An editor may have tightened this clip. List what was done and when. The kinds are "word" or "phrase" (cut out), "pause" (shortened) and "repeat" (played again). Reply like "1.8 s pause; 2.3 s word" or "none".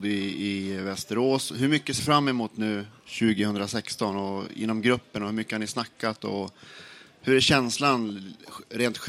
2.0 s word